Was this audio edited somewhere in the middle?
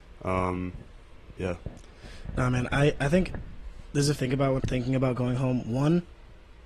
yes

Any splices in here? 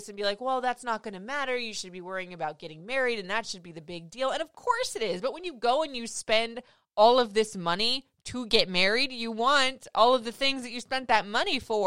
no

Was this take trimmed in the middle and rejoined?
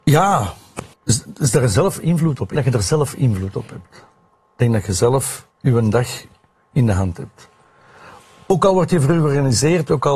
yes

